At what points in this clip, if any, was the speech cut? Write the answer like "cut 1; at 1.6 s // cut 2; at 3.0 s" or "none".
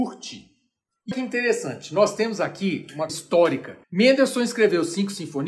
cut 1; at 1.1 s // cut 2; at 3.1 s // cut 3; at 3.8 s